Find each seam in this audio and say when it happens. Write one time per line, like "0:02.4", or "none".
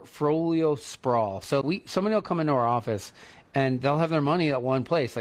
0:01.6